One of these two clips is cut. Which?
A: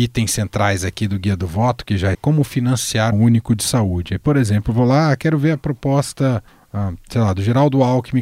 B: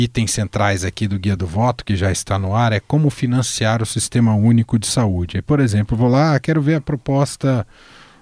A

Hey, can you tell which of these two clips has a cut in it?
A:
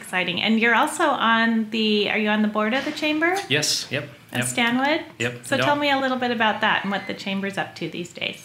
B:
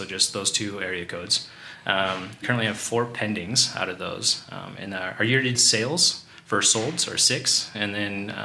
B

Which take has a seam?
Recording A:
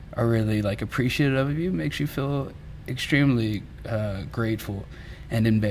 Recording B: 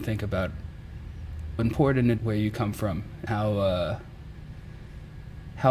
B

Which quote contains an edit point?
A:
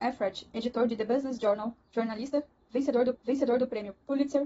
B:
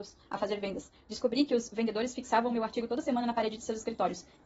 A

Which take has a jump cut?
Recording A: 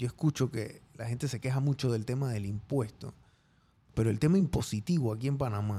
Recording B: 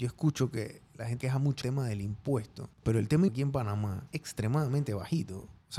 B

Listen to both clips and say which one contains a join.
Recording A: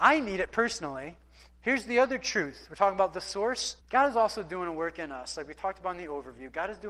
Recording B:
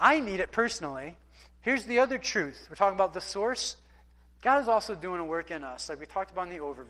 A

